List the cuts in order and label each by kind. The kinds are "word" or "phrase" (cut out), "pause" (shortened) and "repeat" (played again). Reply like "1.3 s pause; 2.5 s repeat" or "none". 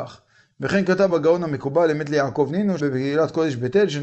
1.1 s word; 2.8 s word